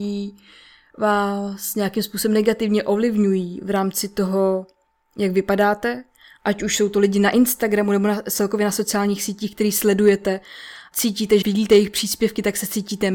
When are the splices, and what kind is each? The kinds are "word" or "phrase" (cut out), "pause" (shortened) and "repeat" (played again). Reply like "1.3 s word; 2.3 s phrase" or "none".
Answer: 10.9 s word; 11.4 s word